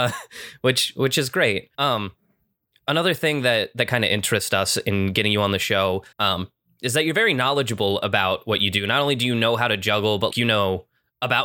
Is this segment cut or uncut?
cut